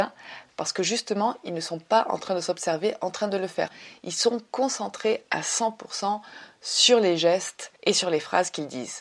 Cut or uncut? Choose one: cut